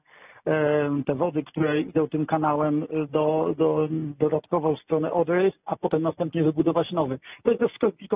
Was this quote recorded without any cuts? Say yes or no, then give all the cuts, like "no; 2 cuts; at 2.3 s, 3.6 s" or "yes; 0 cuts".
yes; 0 cuts